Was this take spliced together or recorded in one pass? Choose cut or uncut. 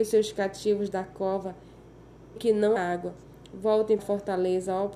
cut